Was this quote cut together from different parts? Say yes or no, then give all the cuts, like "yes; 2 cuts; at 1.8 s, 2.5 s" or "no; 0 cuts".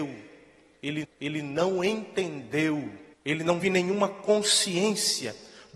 yes; 3 cuts; at 1.0 s, 3.1 s, 3.6 s